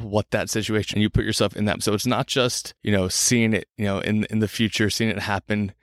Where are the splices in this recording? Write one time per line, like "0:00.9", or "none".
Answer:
0:00.9
0:01.8
0:02.8
0:03.7

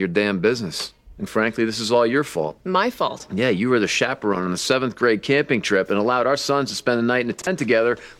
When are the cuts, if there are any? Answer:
0:01.3

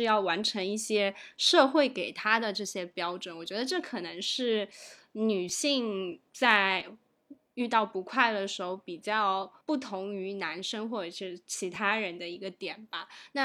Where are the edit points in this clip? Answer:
0:06.3
0:09.6

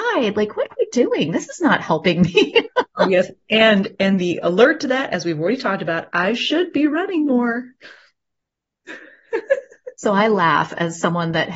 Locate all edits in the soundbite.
0:09.9

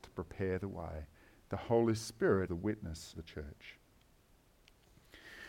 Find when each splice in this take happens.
0:02.5
0:03.1

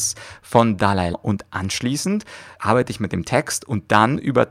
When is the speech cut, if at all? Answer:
0:01.1
0:02.6

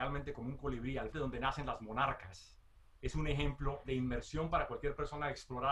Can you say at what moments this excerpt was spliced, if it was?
0:01.1

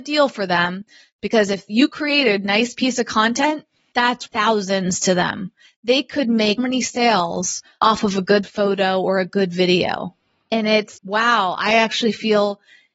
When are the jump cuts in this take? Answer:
0:04.3
0:06.6
0:11.0

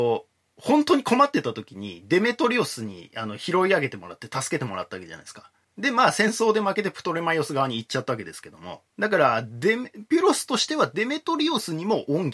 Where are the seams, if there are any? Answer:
none

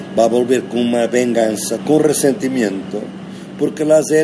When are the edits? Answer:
0:01.8

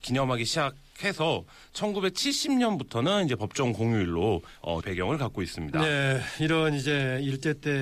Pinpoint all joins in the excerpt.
0:04.8

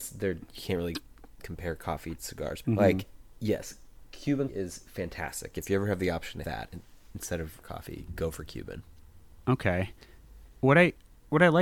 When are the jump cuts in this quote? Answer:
0:02.2
0:02.6
0:04.5
0:06.4
0:07.6

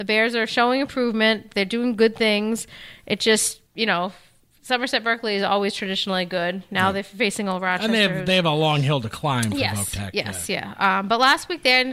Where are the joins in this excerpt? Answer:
0:03.7

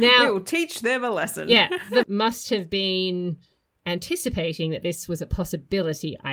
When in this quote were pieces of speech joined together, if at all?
0:02.0

